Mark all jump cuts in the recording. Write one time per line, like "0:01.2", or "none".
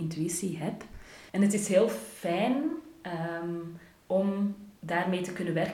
0:01.3
0:04.8